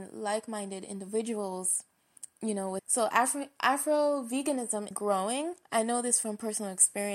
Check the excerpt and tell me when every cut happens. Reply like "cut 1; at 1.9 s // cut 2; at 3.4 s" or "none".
cut 1; at 2.8 s // cut 2; at 4.9 s // cut 3; at 5.6 s